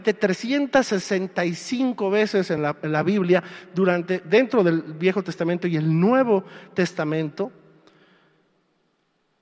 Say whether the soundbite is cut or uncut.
uncut